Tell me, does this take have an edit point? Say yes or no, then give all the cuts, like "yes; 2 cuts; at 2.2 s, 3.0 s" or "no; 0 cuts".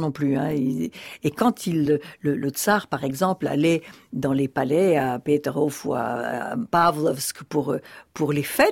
no; 0 cuts